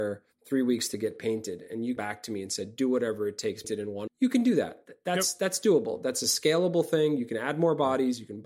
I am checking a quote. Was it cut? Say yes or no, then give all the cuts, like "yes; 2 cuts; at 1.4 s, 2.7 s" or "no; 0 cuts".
yes; 3 cuts; at 2.0 s, 3.6 s, 4.1 s